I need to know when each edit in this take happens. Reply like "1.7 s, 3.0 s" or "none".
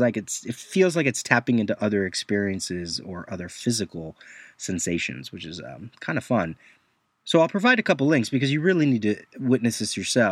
none